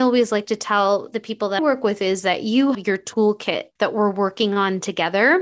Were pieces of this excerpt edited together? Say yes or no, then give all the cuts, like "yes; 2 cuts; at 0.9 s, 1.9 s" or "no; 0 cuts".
yes; 2 cuts; at 1.6 s, 2.7 s